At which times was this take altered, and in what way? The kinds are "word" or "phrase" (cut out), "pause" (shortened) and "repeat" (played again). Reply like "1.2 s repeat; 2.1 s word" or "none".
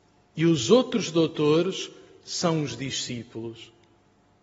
none